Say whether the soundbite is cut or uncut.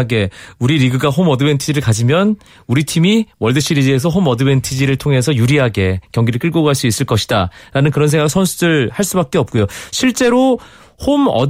uncut